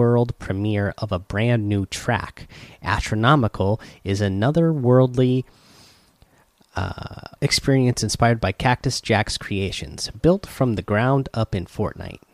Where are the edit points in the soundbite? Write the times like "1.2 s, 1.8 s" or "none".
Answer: 7.4 s